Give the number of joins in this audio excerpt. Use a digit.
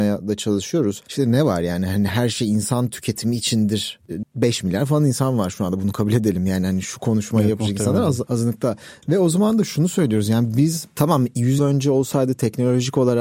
2